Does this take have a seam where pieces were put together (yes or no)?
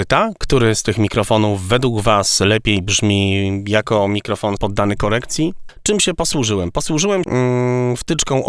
yes